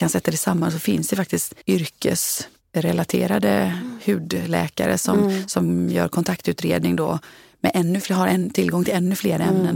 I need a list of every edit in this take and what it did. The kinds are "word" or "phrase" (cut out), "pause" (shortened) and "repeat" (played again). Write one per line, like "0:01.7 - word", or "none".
0:01.6 - pause